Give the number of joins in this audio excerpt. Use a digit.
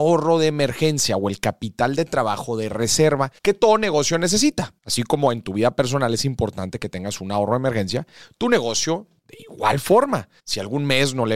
3